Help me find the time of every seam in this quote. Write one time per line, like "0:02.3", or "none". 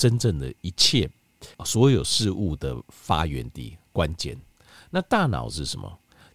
0:01.5